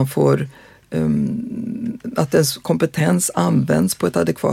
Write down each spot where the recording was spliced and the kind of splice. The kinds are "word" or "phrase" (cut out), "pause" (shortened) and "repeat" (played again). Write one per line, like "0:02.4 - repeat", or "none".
none